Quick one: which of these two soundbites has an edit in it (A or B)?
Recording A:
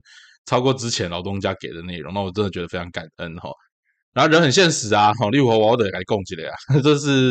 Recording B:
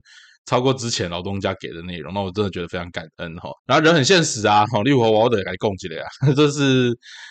B